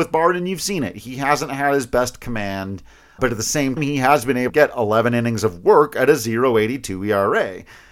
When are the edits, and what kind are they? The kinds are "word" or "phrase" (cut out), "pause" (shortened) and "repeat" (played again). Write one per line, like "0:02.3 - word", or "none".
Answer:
0:03.2 - word
0:03.8 - word
0:04.5 - word